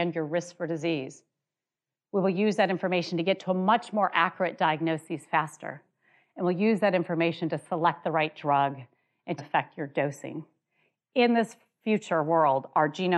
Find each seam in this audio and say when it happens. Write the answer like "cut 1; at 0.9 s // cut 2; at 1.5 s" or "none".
cut 1; at 9.4 s